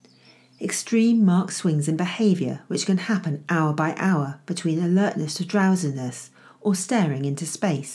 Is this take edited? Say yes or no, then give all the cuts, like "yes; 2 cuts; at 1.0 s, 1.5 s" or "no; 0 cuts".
no; 0 cuts